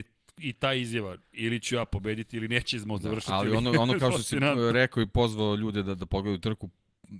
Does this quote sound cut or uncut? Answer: uncut